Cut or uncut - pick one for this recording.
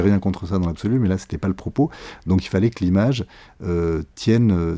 uncut